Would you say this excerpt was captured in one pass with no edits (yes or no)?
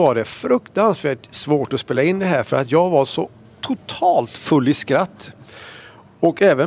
yes